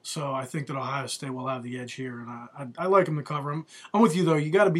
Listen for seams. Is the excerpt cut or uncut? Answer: uncut